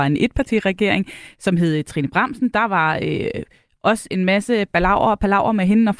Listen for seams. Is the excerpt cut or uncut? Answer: uncut